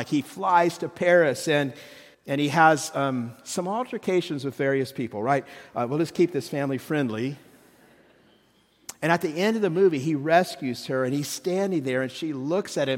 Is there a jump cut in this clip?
yes; 1 cut; at 2.1 s

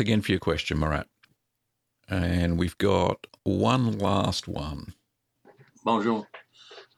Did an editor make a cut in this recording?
no; 0 cuts

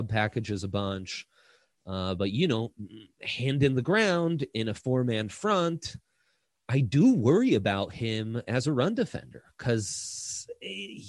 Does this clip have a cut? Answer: no; 0 cuts

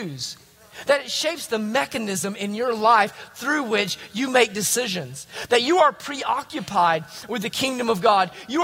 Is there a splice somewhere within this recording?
no; 0 cuts

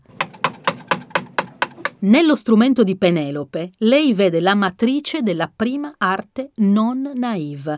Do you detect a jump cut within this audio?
no; 0 cuts

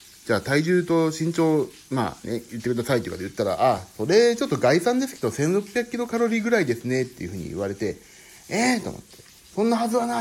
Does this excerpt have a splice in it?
no; 0 cuts

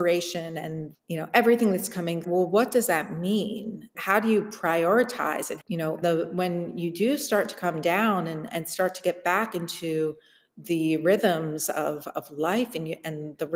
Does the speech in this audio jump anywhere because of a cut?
yes; 5 cuts; at 0.9 s, 2.2 s, 3.9 s, 5.6 s, 6.0 s

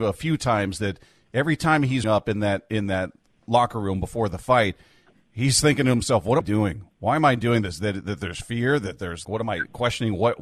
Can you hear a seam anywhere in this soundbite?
yes; 3 cuts; at 2.0 s, 6.4 s, 9.2 s

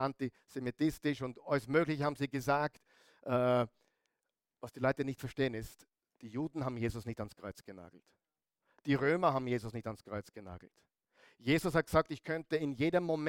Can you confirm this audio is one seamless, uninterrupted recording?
yes; 0 cuts

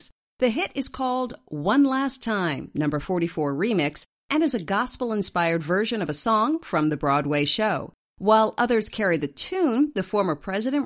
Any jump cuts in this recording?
no; 0 cuts

